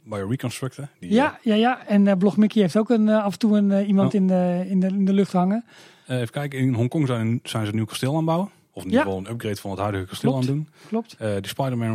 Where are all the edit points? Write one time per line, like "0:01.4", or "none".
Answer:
none